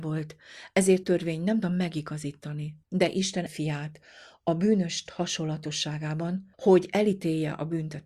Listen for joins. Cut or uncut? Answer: cut